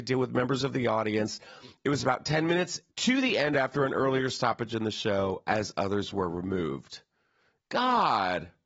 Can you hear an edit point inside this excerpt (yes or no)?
yes